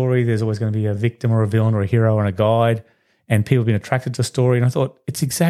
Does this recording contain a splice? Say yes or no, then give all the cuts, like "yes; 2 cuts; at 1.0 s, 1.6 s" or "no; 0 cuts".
no; 0 cuts